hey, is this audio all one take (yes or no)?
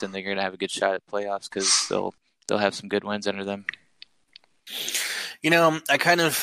yes